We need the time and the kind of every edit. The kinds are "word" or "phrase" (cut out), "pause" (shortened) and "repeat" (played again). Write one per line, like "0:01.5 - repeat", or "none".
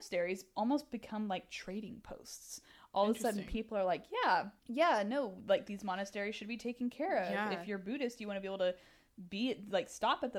0:04.6 - pause